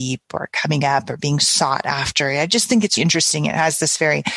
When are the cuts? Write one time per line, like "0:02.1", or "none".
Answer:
0:03.0